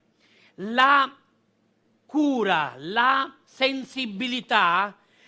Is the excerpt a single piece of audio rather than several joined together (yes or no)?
yes